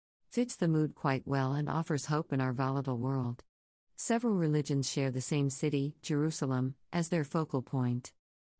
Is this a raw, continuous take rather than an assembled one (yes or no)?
yes